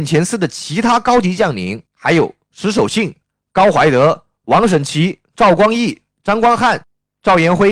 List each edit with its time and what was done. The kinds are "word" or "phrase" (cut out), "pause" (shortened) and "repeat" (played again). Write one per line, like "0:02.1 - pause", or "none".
0:01.9 - pause